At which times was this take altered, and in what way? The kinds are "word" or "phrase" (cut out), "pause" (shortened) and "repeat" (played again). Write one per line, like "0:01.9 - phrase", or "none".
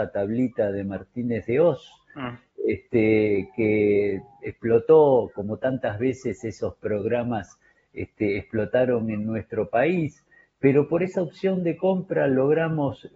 none